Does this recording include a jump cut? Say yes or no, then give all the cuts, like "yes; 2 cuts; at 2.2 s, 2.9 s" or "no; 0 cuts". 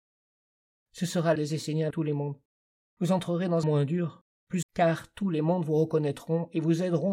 yes; 5 cuts; at 1.4 s, 1.9 s, 2.6 s, 3.6 s, 4.6 s